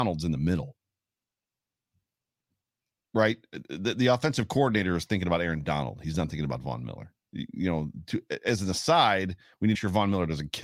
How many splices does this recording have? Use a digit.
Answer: 1